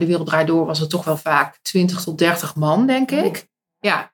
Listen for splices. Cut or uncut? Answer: uncut